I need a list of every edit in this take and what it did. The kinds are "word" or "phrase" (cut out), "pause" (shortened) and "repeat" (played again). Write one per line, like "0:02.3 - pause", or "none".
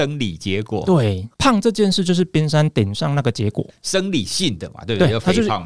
0:01.3 - pause